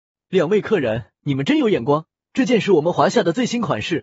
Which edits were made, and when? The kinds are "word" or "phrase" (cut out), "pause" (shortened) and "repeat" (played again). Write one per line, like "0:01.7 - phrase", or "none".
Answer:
0:01.2 - pause
0:02.1 - pause